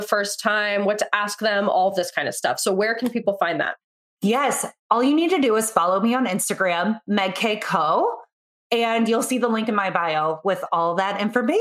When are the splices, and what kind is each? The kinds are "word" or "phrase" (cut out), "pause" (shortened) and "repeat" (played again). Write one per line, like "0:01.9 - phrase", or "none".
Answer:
0:04.8 - pause